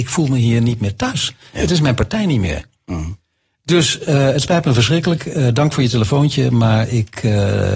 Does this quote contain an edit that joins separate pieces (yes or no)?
no